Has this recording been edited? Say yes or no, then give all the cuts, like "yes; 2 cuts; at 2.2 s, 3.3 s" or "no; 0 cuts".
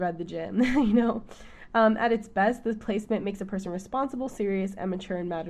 no; 0 cuts